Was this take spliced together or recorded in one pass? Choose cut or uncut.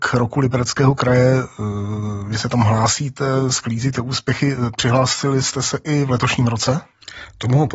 uncut